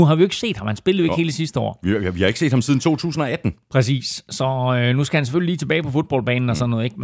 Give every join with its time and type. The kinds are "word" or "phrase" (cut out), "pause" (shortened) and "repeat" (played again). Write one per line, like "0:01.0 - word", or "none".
none